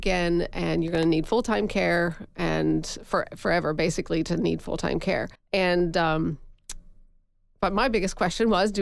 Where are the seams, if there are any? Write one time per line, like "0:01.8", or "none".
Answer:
0:05.4